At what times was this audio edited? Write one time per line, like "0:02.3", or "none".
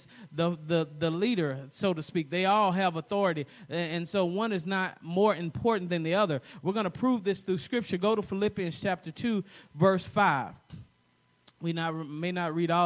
none